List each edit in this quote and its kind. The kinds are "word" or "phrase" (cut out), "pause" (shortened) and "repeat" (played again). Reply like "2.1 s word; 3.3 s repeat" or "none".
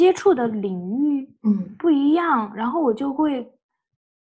1.4 s pause